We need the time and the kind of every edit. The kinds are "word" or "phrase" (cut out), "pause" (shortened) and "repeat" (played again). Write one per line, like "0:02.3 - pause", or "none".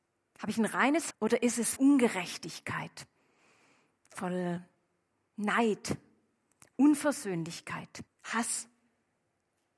0:01.1 - word
0:01.8 - word
0:08.1 - word